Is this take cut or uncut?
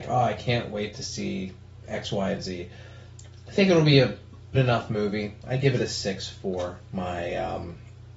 cut